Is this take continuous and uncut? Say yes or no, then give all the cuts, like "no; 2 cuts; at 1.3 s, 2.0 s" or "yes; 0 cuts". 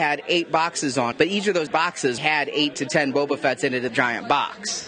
no; 4 cuts; at 1.1 s, 1.7 s, 2.2 s, 3.9 s